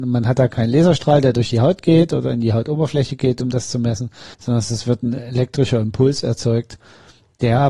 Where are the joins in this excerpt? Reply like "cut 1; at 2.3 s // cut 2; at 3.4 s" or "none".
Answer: cut 1; at 4.3 s